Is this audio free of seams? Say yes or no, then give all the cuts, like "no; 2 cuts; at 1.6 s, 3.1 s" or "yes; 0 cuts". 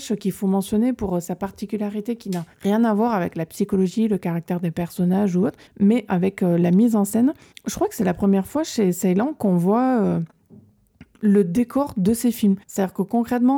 no; 4 cuts; at 2.5 s, 5.7 s, 7.5 s, 12.6 s